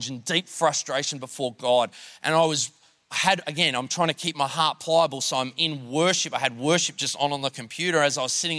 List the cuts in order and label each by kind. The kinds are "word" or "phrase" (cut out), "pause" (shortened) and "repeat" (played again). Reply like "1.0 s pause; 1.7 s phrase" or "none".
none